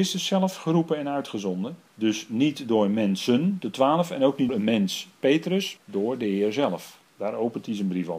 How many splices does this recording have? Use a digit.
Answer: 3